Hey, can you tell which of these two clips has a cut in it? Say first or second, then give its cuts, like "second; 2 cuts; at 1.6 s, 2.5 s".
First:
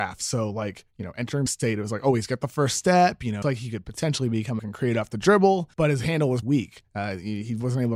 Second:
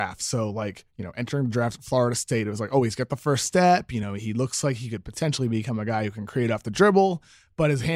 first; 5 cuts; at 1.5 s, 3.4 s, 4.6 s, 5.7 s, 6.4 s